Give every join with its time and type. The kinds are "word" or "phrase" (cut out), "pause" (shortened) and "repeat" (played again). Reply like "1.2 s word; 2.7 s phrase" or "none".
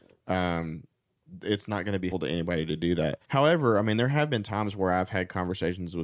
2.1 s word; 3.2 s pause